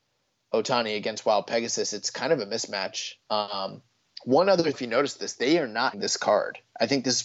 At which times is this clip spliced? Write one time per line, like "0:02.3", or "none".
0:03.2
0:04.7
0:05.9